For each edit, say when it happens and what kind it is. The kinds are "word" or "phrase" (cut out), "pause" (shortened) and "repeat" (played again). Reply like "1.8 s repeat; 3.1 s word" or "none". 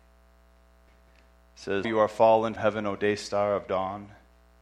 1.8 s word; 2.6 s word